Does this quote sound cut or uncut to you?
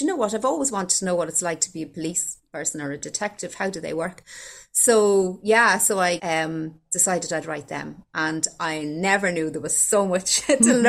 cut